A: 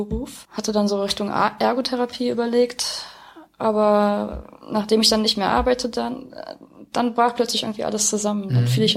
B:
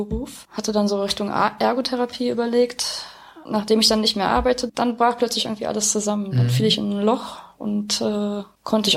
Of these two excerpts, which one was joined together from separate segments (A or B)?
B